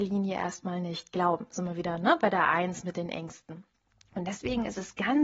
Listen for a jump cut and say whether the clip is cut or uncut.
uncut